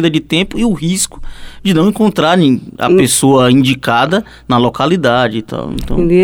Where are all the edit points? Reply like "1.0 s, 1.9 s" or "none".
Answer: none